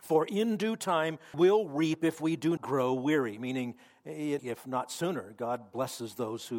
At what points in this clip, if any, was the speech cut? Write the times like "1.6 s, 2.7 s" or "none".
1.3 s, 2.6 s, 4.4 s